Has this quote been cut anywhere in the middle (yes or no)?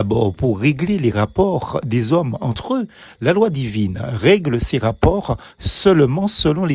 no